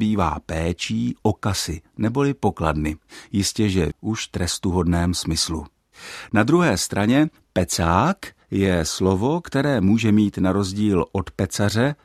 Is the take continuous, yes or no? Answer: no